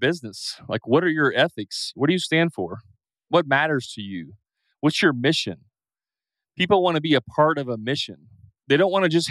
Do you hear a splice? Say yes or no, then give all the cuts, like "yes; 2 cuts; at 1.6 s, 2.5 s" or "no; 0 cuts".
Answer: no; 0 cuts